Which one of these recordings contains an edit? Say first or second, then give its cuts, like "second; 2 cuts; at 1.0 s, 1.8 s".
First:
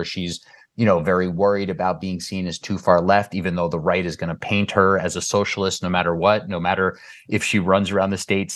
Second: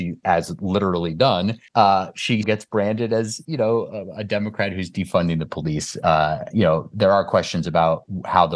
second; 3 cuts; at 1.7 s, 2.4 s, 6.5 s